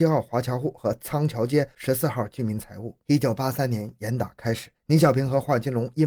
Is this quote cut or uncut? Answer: cut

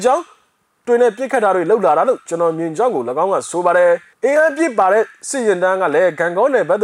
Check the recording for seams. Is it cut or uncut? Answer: cut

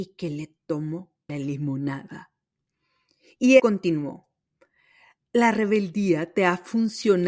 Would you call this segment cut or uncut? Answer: cut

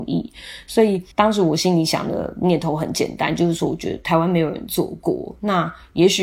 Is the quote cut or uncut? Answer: cut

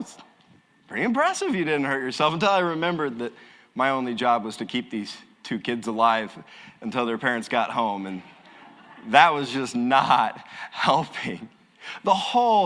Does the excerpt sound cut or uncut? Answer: uncut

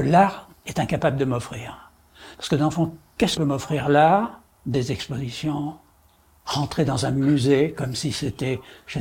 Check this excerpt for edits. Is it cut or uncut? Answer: cut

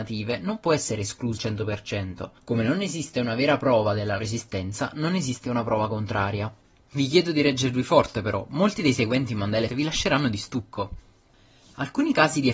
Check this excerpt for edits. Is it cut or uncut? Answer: cut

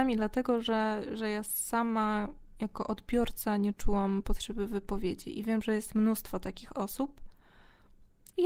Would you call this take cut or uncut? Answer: uncut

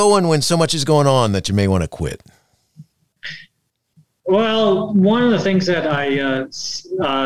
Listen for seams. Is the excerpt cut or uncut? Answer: uncut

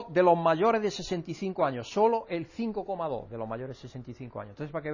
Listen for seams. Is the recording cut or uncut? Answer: uncut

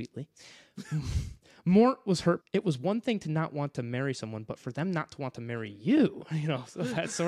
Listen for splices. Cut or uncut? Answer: cut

